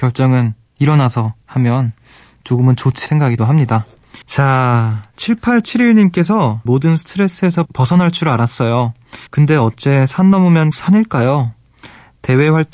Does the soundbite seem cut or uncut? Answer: cut